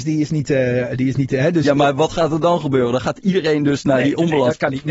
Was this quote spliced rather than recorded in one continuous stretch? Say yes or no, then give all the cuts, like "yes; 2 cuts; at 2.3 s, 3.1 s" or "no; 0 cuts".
no; 0 cuts